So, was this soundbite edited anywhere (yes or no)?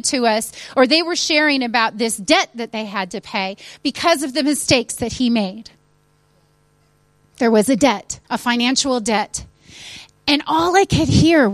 yes